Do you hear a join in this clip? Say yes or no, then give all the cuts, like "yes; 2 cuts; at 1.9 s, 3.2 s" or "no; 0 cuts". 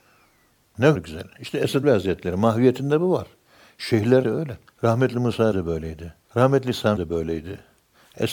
yes; 7 cuts; at 0.9 s, 1.8 s, 4.2 s, 4.7 s, 5.5 s, 6.2 s, 7.0 s